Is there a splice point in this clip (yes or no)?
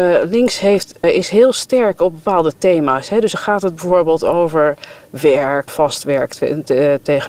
yes